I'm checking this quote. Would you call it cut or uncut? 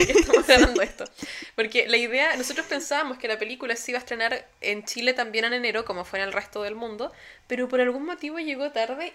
uncut